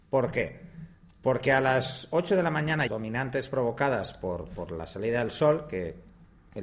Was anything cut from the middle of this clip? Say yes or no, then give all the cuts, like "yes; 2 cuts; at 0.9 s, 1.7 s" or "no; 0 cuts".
yes; 1 cut; at 2.9 s